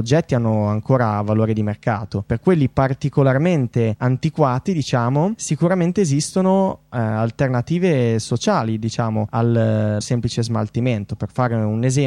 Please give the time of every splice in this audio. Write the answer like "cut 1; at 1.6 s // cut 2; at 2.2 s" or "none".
cut 1; at 10.0 s

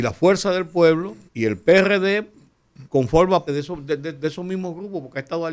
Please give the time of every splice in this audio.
cut 1; at 1.3 s // cut 2; at 2.9 s // cut 3; at 3.5 s

